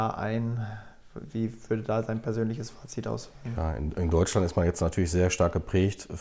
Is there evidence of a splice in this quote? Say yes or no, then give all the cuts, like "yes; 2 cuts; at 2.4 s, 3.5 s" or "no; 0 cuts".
no; 0 cuts